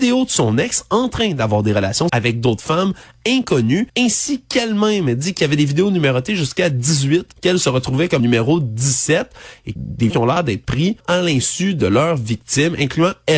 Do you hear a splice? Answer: yes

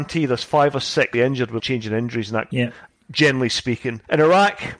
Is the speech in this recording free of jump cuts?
no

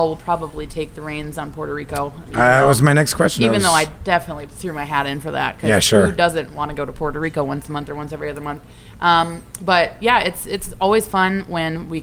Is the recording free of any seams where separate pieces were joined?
yes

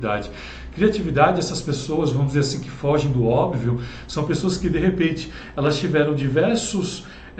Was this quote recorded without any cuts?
yes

